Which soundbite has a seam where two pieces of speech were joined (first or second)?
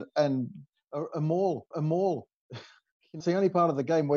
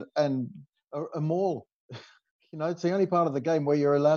first